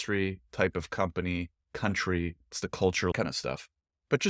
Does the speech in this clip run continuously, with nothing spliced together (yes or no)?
no